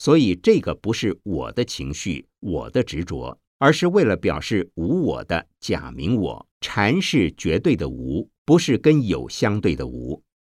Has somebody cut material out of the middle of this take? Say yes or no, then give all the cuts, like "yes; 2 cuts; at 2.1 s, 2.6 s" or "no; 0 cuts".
yes; 3 cuts; at 3.5 s, 6.5 s, 8.4 s